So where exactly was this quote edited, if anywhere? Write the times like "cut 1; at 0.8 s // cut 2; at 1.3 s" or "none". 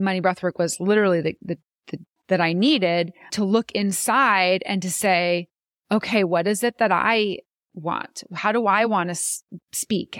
cut 1; at 2.2 s